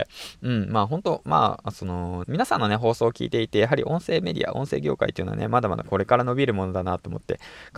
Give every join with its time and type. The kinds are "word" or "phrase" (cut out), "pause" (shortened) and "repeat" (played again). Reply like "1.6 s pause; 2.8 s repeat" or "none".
2.2 s word